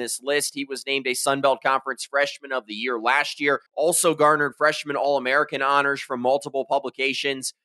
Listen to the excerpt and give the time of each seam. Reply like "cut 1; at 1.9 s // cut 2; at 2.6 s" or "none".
cut 1; at 3.7 s